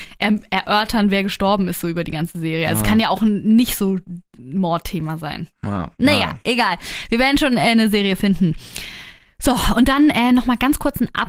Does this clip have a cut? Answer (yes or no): no